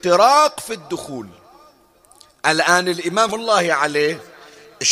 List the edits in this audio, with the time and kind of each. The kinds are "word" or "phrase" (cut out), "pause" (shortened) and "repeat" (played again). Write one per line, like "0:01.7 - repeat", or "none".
0:03.3 - word